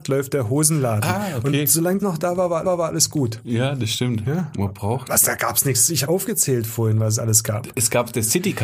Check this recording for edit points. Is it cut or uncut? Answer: cut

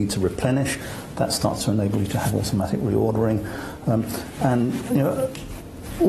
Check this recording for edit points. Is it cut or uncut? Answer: uncut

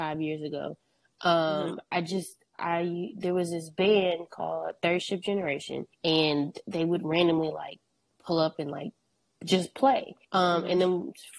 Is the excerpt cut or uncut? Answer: cut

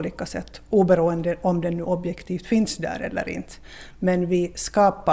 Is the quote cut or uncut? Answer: uncut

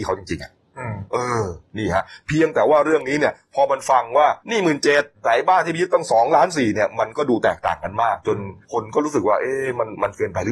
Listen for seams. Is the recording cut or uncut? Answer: cut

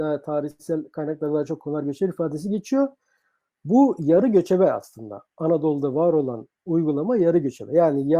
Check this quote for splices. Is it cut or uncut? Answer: uncut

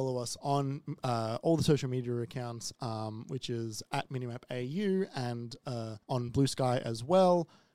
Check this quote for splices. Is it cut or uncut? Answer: cut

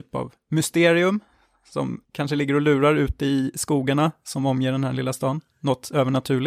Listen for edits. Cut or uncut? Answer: cut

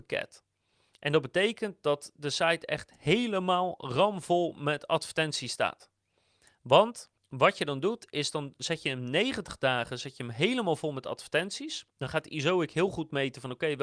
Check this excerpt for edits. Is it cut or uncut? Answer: cut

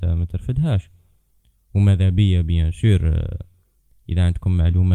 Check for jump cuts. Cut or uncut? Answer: uncut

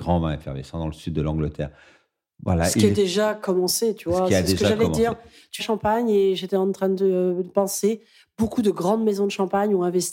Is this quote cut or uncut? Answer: cut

